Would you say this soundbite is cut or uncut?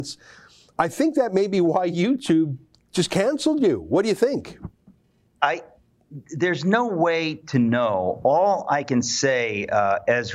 uncut